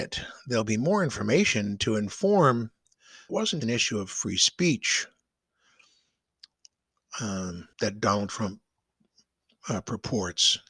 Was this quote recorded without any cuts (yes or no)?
no